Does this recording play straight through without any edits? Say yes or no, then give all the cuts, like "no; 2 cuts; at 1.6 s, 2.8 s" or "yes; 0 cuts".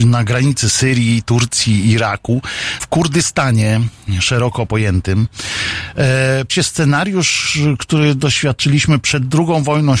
no; 2 cuts; at 2.8 s, 6.5 s